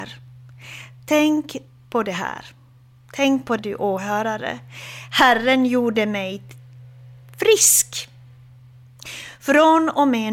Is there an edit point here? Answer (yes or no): yes